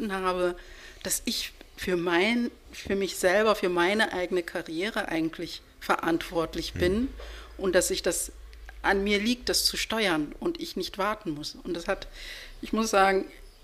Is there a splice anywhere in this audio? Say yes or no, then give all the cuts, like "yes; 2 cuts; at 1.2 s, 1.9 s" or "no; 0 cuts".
no; 0 cuts